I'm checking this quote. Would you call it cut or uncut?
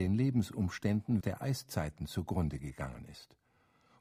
cut